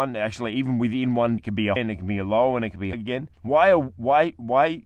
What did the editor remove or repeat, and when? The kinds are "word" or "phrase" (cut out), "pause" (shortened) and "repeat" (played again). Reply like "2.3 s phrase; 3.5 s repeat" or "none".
1.4 s word; 1.8 s word; 2.9 s word; 3.3 s pause